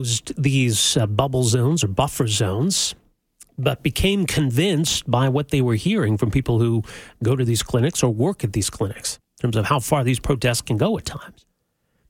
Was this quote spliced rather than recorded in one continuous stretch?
no; 0 cuts

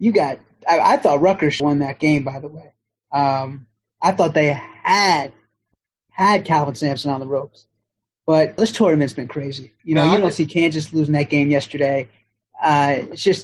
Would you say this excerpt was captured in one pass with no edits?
no; 3 cuts; at 1.6 s, 8.6 s, 9.8 s

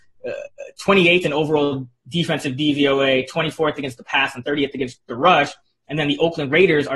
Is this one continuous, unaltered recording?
yes; 0 cuts

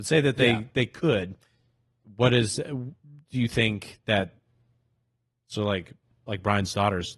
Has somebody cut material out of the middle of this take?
no; 0 cuts

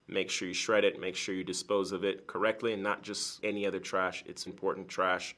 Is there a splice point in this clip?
yes; 2 cuts; at 3.4 s, 4.5 s

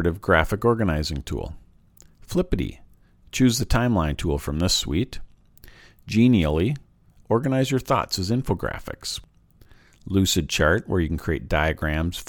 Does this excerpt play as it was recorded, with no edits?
yes; 0 cuts

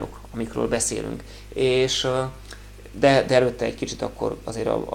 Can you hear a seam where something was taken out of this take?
no; 0 cuts

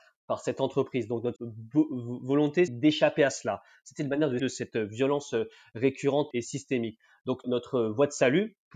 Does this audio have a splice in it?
yes; 5 cuts; at 1.4 s, 2.7 s, 4.4 s, 6.3 s, 7.4 s

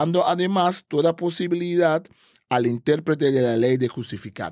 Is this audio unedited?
yes; 0 cuts

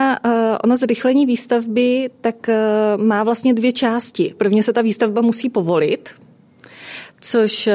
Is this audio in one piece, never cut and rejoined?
no; 1 cut; at 4.4 s

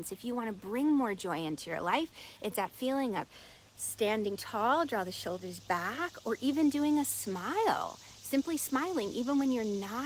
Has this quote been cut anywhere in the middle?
no; 0 cuts

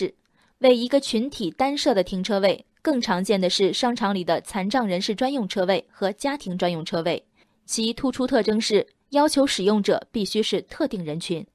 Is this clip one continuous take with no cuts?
yes; 0 cuts

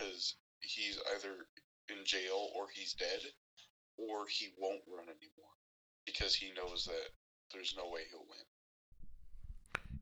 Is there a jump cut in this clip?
no; 0 cuts

